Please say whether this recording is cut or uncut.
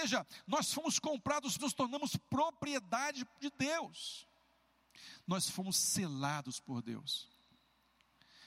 cut